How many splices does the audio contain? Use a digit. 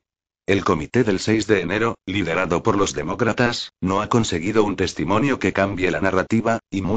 0